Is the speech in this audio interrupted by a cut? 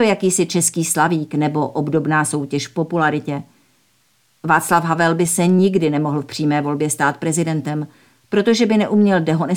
no; 0 cuts

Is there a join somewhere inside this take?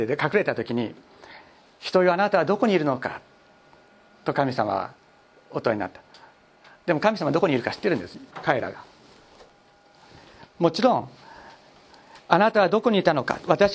yes; 1 cut; at 8.3 s

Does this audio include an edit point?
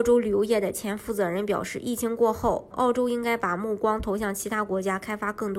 yes; 1 cut; at 2.7 s

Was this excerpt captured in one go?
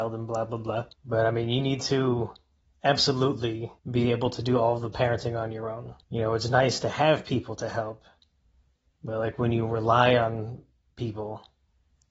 no; 3 cuts; at 0.9 s, 3.8 s, 6.0 s

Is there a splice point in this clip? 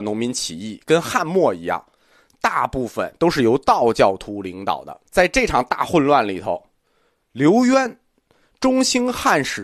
yes; 1 cut; at 5.1 s

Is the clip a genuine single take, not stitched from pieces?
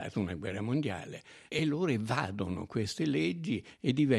yes; 0 cuts

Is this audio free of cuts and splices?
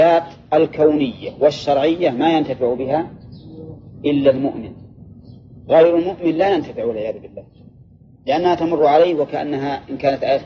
yes; 0 cuts

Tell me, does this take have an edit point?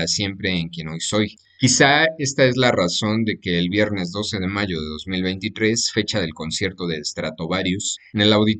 no; 0 cuts

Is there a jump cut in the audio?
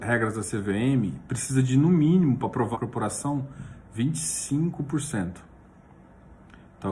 yes; 1 cut; at 2.7 s

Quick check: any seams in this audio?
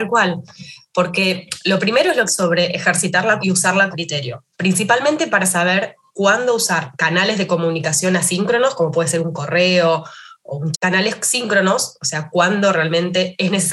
yes; 5 cuts; at 2.3 s, 3.4 s, 3.9 s, 4.5 s, 10.7 s

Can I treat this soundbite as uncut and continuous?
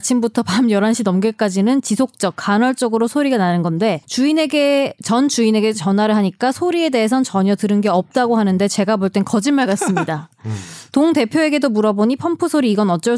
no; 1 cut; at 4.0 s

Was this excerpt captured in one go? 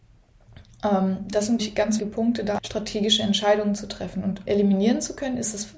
no; 4 cuts; at 1.6 s, 2.0 s, 2.6 s, 4.5 s

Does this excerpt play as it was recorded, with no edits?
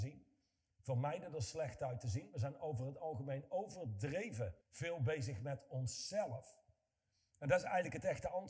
no; 1 cut; at 4.6 s

